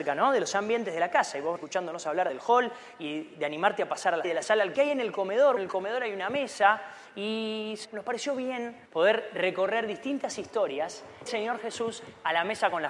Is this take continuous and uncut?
no; 8 cuts; at 1.6 s, 2.3 s, 4.2 s, 4.7 s, 5.6 s, 7.8 s, 8.8 s, 11.3 s

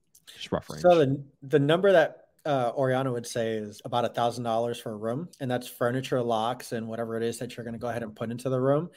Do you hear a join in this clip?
yes; 3 cuts; at 2.4 s, 3.8 s, 5.3 s

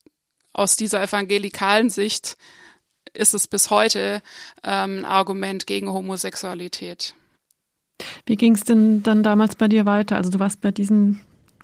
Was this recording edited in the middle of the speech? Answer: no; 0 cuts

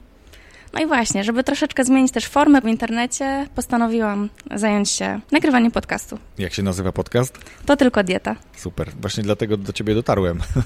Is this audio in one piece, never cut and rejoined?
no; 2 cuts; at 2.6 s, 5.2 s

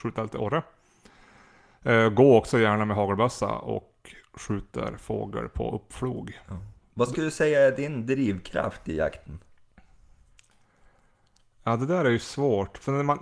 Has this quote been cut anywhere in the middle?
no; 0 cuts

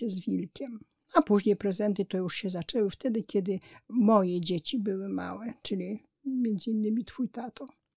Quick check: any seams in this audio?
no; 0 cuts

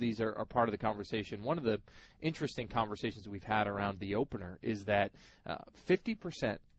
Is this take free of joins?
yes; 0 cuts

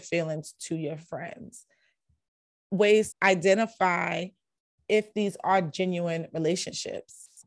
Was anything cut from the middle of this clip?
yes; 2 cuts; at 2.6 s, 3.1 s

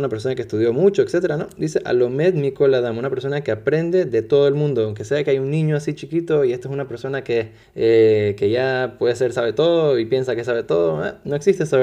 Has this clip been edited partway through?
yes; 1 cut; at 7.6 s

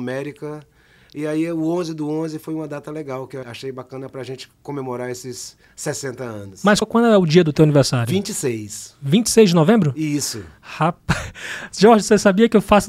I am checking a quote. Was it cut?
yes; 2 cuts; at 3.4 s, 6.8 s

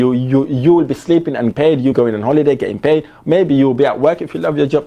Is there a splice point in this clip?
yes; 2 cuts; at 1.5 s, 1.9 s

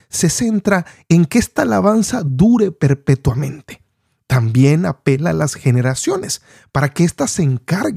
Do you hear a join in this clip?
no; 0 cuts

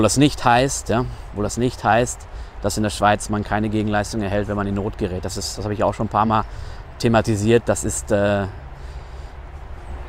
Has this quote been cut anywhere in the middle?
no; 0 cuts

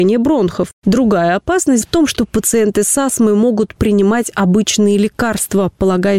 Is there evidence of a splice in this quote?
yes; 2 cuts; at 1.8 s, 3.8 s

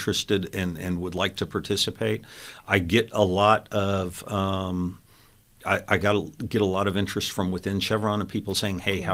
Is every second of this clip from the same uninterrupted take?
yes; 0 cuts

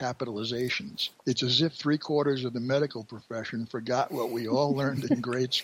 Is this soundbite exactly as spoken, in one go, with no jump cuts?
no; 1 cut; at 1.2 s

